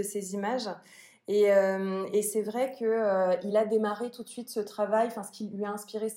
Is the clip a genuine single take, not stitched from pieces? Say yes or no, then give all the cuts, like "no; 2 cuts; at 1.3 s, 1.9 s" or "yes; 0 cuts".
yes; 0 cuts